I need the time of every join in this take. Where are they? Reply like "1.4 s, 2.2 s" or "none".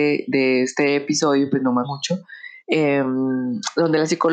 1.8 s, 2.6 s